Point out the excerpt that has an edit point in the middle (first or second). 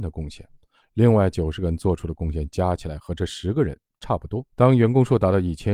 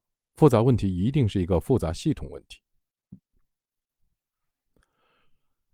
first